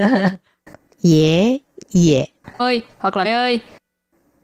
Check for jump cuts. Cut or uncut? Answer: cut